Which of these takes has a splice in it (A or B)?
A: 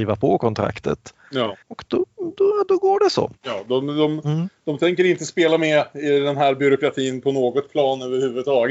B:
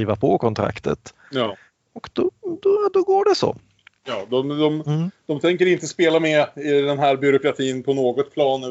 A